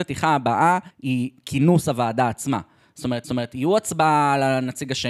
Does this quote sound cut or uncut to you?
cut